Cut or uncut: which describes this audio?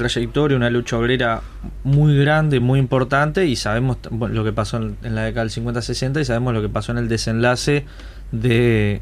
uncut